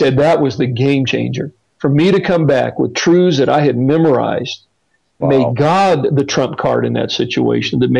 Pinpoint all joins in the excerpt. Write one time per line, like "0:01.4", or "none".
0:05.2